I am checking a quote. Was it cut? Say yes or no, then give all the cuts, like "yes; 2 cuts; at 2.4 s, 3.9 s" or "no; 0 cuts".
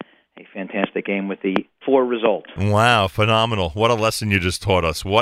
yes; 1 cut; at 1.8 s